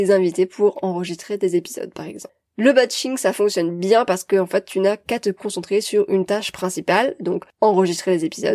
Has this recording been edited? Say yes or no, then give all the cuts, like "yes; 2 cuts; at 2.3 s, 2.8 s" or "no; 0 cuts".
no; 0 cuts